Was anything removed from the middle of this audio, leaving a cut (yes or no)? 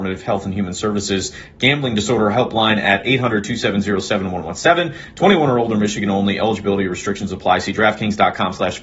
no